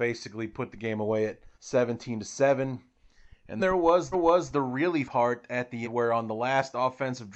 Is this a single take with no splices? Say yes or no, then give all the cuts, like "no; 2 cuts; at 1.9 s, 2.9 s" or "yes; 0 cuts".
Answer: no; 5 cuts; at 1.5 s, 3.6 s, 4.1 s, 5.0 s, 5.8 s